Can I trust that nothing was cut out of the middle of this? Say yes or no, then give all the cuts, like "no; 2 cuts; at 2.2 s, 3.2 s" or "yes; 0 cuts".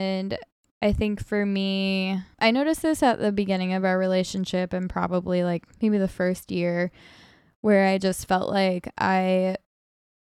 yes; 0 cuts